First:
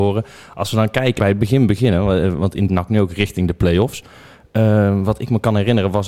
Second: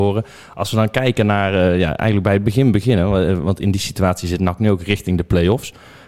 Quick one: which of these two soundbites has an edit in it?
first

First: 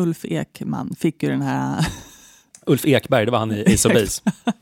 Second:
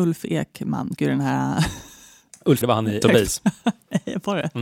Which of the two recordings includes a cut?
second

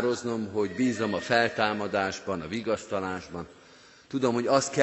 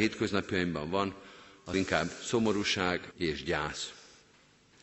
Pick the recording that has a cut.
second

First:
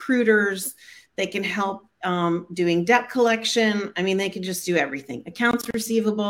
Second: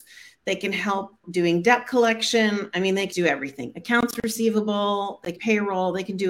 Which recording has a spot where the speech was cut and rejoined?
second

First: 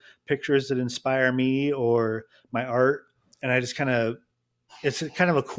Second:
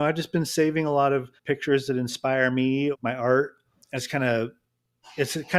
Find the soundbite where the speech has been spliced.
second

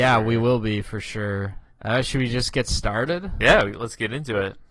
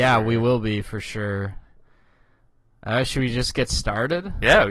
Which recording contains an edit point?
first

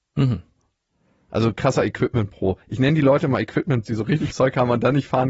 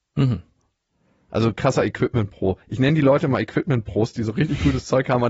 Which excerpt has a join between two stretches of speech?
first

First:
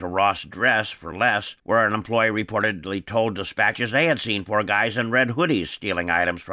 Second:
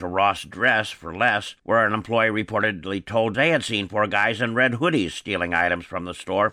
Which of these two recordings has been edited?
second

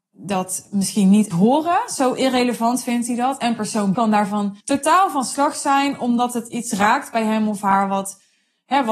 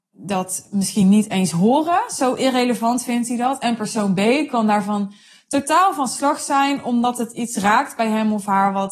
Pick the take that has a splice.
first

